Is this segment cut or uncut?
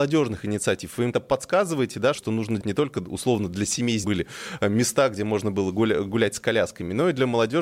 cut